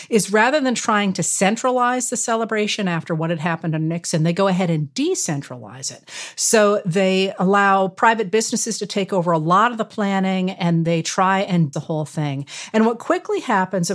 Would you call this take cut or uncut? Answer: cut